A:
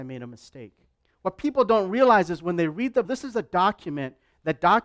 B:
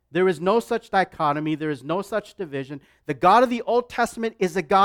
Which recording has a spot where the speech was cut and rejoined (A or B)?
A